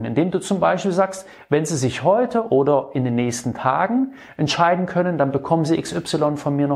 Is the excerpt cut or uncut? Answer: uncut